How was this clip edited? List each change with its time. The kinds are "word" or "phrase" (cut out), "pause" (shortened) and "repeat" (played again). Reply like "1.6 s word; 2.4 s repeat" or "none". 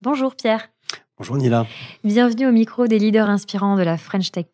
none